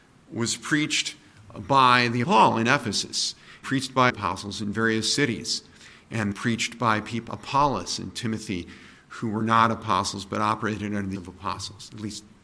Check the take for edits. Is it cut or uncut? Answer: cut